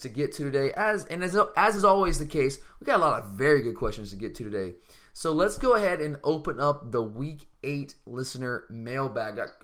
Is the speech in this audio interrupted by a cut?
no; 0 cuts

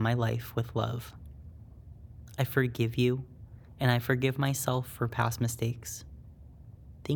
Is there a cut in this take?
no; 0 cuts

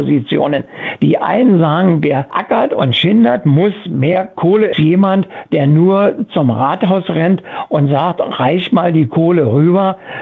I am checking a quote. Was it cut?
yes; 1 cut; at 4.7 s

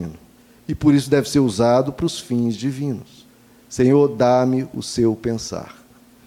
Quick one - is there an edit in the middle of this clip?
no; 0 cuts

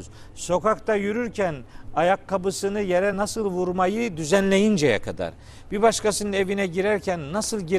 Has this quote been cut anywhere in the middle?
no; 0 cuts

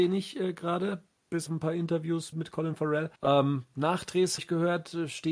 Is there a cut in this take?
yes; 4 cuts; at 1.5 s, 2.3 s, 3.2 s, 4.4 s

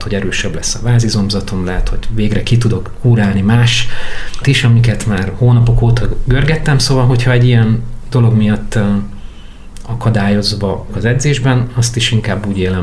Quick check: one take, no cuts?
no; 2 cuts; at 4.4 s, 10.9 s

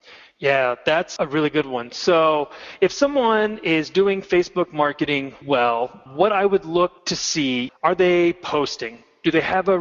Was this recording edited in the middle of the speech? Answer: yes; 5 cuts; at 1.2 s, 5.4 s, 6.1 s, 7.0 s, 7.7 s

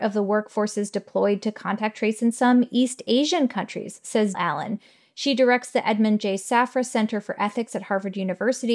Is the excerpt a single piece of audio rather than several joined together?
no; 1 cut; at 4.3 s

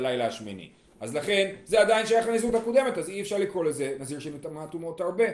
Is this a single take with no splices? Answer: yes; 0 cuts

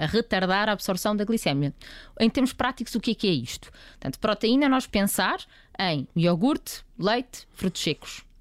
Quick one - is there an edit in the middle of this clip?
yes; 1 cut; at 4.9 s

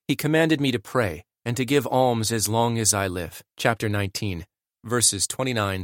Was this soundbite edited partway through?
yes; 1 cut; at 3.5 s

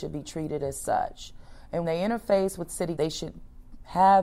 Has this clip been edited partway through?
yes; 2 cuts; at 1.8 s, 3.0 s

